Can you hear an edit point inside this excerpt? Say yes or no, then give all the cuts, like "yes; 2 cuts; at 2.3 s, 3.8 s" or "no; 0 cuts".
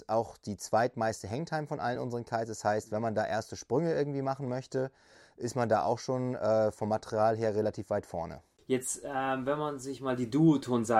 no; 0 cuts